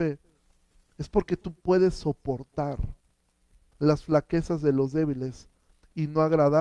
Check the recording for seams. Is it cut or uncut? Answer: uncut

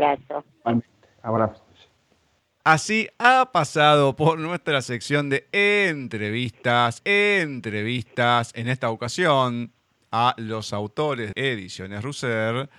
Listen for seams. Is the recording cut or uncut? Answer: cut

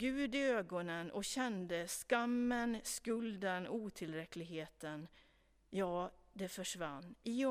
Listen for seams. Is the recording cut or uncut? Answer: uncut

